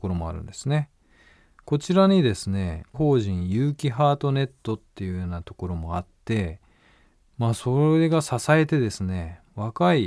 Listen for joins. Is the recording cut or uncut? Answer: cut